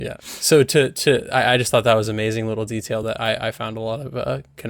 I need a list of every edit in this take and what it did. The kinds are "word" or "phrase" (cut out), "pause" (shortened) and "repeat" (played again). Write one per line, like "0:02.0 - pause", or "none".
none